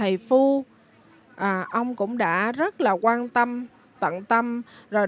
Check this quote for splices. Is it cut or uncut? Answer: uncut